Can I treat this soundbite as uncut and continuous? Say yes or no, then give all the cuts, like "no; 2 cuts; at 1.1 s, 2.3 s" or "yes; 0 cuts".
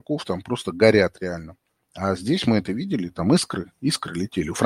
yes; 0 cuts